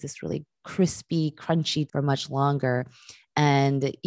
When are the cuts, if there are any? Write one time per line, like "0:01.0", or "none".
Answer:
0:01.9